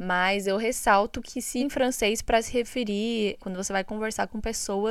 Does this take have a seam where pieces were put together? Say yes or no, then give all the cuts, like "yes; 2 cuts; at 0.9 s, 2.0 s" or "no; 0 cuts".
yes; 2 cuts; at 1.6 s, 3.4 s